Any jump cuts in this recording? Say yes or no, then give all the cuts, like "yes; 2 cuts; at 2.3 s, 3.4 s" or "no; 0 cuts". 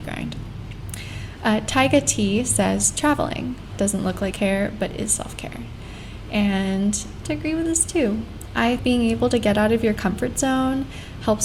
yes; 3 cuts; at 4.3 s, 7.2 s, 8.8 s